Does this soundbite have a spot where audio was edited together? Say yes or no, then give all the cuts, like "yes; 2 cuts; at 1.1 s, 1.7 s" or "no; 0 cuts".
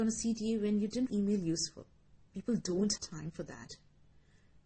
yes; 3 cuts; at 1.1 s, 2.2 s, 3.0 s